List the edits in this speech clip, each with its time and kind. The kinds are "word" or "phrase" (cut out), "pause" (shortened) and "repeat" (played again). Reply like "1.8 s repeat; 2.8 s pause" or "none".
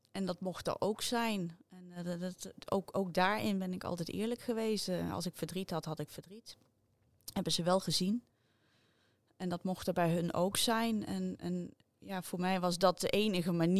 none